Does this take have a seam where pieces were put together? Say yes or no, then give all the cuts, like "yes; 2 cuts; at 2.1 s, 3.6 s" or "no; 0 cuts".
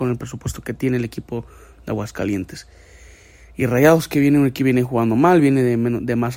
no; 0 cuts